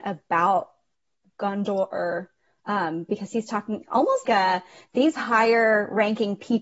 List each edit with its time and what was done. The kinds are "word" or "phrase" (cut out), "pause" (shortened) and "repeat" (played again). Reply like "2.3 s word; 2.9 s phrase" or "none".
4.3 s word